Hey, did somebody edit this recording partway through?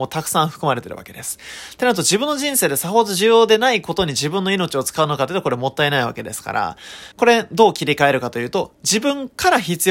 yes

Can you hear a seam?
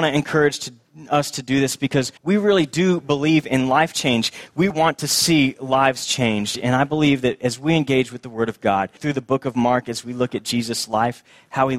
yes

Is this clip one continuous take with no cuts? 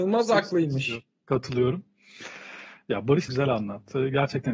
no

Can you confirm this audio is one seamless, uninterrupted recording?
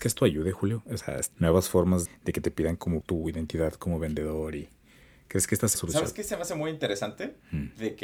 no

